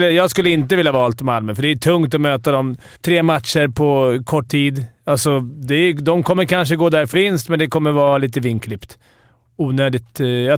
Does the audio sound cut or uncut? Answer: cut